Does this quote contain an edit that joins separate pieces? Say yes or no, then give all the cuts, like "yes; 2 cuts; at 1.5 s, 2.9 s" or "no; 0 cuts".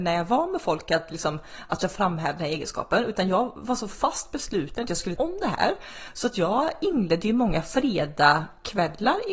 yes; 1 cut; at 5.2 s